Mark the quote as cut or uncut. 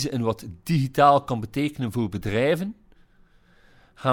uncut